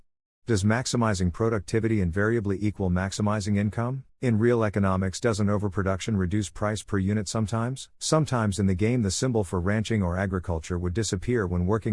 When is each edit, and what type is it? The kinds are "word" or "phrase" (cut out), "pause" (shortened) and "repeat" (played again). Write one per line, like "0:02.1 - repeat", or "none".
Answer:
0:04.1 - pause
0:07.9 - pause